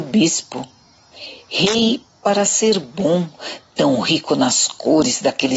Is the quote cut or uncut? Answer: uncut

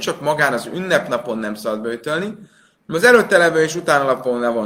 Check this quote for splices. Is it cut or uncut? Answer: uncut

